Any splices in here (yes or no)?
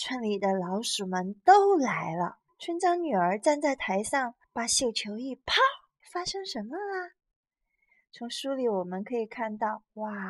yes